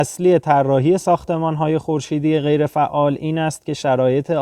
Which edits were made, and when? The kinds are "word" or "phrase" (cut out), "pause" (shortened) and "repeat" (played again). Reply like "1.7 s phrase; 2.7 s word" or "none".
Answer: none